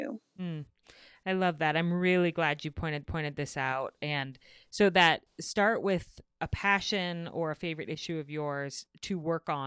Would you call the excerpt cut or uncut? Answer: cut